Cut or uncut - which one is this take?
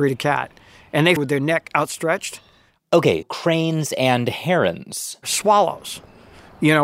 cut